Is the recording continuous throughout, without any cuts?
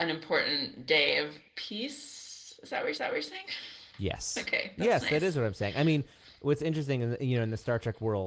no; 3 cuts; at 1.5 s, 3.0 s, 7.2 s

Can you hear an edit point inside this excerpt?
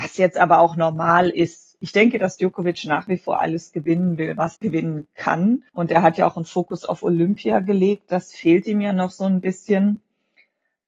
yes; 2 cuts; at 4.5 s, 5.7 s

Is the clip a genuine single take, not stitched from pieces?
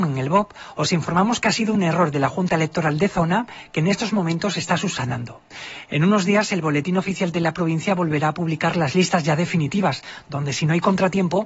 yes; 0 cuts

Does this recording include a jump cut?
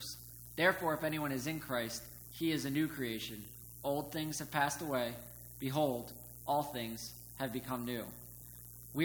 no; 0 cuts

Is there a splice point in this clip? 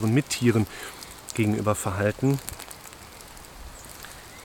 no; 0 cuts

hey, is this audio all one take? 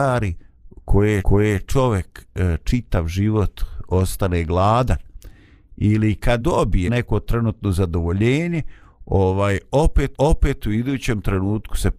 no; 4 cuts; at 1.2 s, 6.4 s, 6.9 s, 10.1 s

